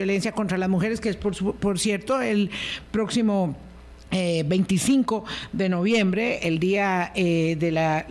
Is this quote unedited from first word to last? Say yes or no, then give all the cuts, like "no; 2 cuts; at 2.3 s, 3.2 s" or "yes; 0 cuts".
yes; 0 cuts